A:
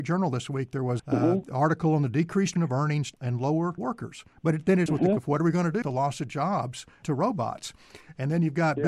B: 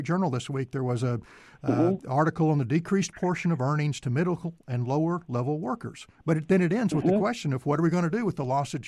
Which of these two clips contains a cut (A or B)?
A